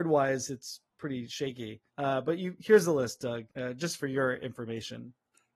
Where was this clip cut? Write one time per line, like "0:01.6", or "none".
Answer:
0:01.9
0:03.5